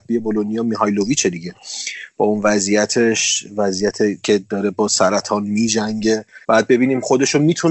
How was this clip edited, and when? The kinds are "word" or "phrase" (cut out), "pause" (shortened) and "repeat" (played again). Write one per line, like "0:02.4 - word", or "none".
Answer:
0:06.4 - pause